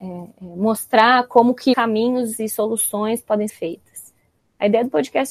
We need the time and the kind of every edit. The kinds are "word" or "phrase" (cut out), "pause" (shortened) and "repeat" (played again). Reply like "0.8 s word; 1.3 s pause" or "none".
1.7 s word; 3.5 s word